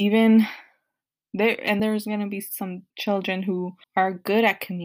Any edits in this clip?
yes; 3 cuts; at 1.8 s, 2.9 s, 3.8 s

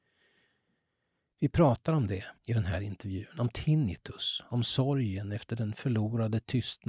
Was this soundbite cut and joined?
yes; 1 cut; at 2.4 s

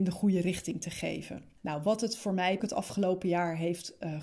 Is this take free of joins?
no; 2 cuts; at 1.6 s, 2.6 s

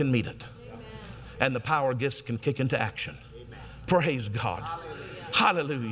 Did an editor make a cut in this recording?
no; 0 cuts

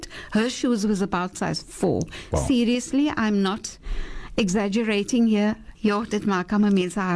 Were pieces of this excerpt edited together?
yes; 1 cut; at 5.8 s

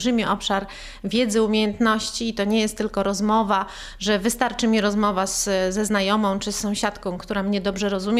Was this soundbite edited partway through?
no; 0 cuts

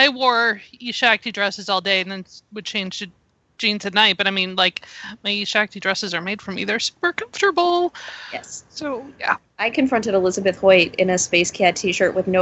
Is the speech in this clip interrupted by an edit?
no; 0 cuts

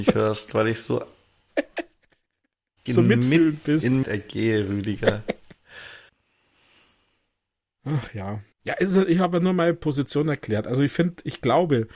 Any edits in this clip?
yes; 4 cuts; at 2.9 s, 4.0 s, 6.1 s, 8.5 s

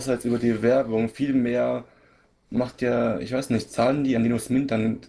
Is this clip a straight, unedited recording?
yes; 0 cuts

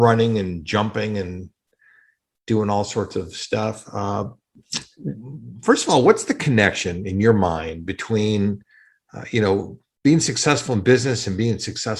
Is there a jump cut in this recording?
no; 0 cuts

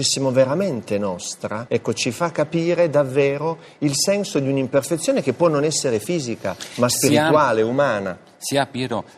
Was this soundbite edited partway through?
no; 0 cuts

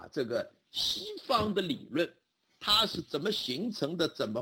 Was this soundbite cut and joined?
no; 0 cuts

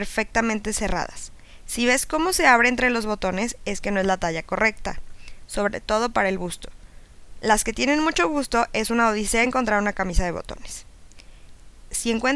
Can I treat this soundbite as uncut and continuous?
yes; 0 cuts

